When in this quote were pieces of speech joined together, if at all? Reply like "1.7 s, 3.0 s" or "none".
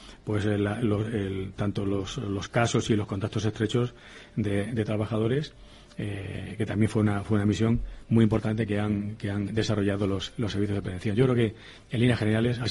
none